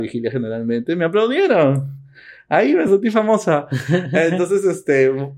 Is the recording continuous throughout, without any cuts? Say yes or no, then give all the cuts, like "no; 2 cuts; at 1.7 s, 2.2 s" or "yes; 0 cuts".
yes; 0 cuts